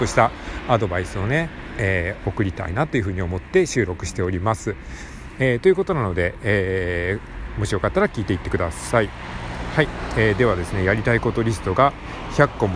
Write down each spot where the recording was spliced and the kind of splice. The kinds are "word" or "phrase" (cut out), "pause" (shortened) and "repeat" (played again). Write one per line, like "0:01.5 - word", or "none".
none